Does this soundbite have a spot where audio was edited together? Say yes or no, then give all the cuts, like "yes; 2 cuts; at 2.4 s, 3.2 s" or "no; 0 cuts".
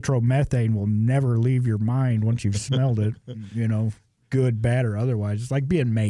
no; 0 cuts